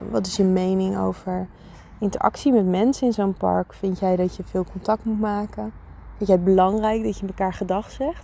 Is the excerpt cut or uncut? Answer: uncut